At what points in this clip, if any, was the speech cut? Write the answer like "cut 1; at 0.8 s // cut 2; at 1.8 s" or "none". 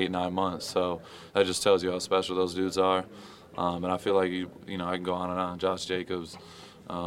none